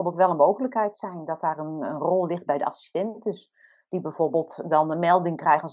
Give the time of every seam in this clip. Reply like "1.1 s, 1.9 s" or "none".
none